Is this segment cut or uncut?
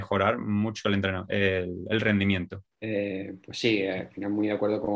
cut